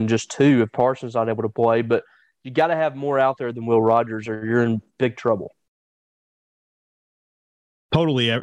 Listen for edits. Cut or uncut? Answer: uncut